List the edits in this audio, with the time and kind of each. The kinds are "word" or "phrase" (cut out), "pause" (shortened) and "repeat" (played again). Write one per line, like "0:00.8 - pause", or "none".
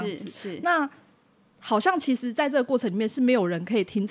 none